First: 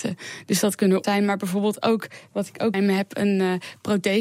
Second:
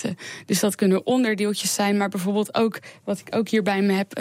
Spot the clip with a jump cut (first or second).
first